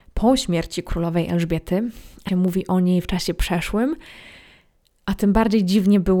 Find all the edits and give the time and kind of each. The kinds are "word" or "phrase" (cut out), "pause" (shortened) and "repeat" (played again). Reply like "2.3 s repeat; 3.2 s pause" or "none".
2.3 s phrase

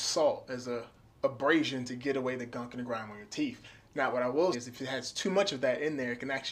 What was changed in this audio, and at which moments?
1.0 s pause; 4.5 s word

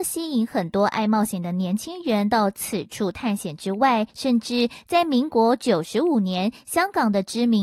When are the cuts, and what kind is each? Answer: 4.1 s pause

